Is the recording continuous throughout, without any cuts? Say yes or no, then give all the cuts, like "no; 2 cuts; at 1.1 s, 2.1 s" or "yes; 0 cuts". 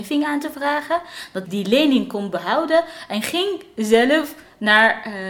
no; 1 cut; at 1.4 s